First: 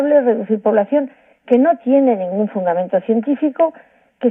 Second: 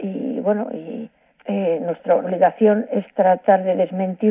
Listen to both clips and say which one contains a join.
second; 2 cuts; at 1.3 s, 2.2 s

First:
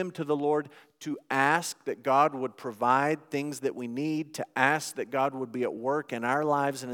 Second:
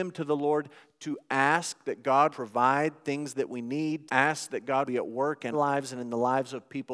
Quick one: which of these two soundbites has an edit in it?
second; 4 cuts; at 2.3 s, 4.1 s, 4.8 s, 5.5 s

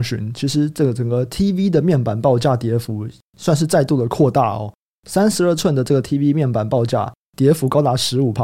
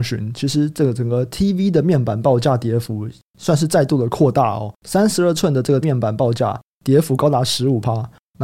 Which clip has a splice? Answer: second; 2 cuts; at 4.8 s, 5.8 s

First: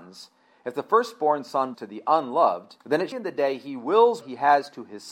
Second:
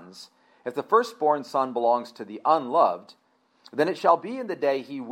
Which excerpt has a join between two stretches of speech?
first; 4 cuts; at 1.7 s, 2.8 s, 3.1 s, 4.2 s

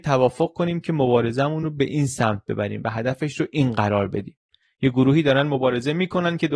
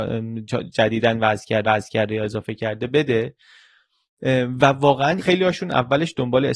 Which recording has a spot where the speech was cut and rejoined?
second; 2 cuts; at 1.6 s, 5.2 s

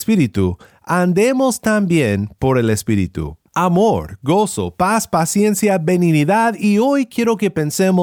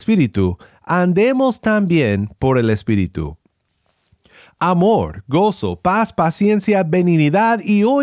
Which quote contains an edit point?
first; 1 cut; at 3.5 s

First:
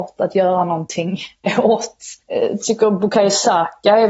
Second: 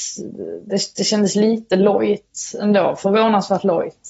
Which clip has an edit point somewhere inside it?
first; 1 cut; at 2.2 s

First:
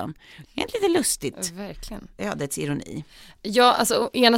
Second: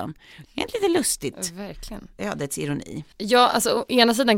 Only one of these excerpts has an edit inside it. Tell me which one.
second; 1 cut; at 3.1 s

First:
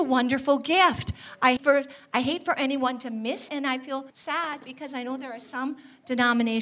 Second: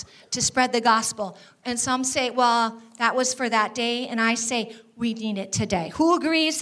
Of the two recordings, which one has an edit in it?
first; 3 cuts; at 1.6 s, 3.5 s, 4.1 s

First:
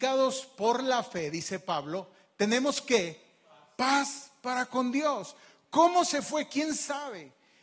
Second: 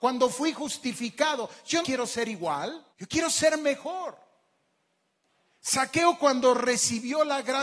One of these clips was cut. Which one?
second; 2 cuts; at 1.8 s, 2.9 s

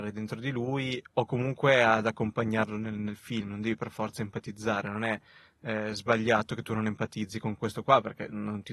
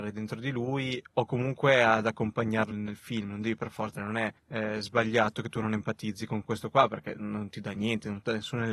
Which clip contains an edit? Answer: second; 3 cuts; at 2.7 s, 3.9 s, 4.4 s

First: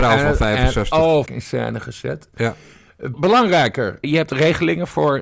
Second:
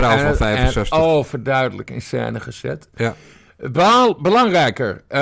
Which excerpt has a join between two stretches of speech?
first; 3 cuts; at 1.3 s, 3.1 s, 4.0 s

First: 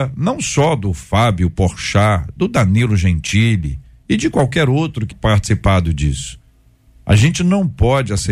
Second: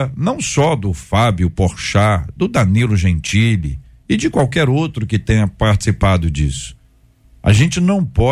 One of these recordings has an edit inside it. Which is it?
first; 1 cut; at 5.1 s

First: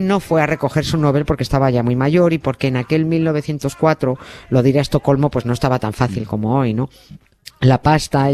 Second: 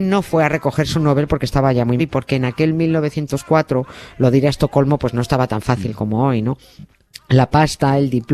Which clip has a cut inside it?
second; 1 cut; at 2.0 s

